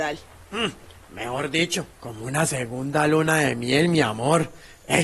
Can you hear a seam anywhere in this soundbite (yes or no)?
yes